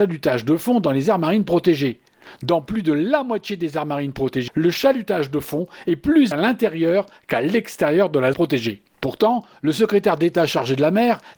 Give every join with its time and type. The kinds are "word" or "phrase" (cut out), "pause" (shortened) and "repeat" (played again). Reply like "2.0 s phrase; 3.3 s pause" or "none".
4.5 s word; 6.3 s word; 8.3 s word